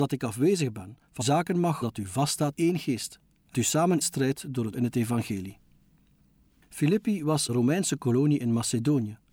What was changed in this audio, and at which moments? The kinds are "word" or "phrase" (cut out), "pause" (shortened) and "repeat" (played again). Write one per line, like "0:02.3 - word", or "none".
0:01.2 - word
0:01.8 - word
0:02.5 - word
0:03.5 - word
0:04.0 - word
0:04.7 - word
0:07.5 - word